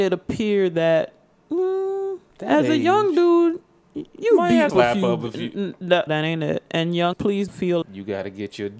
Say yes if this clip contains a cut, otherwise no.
yes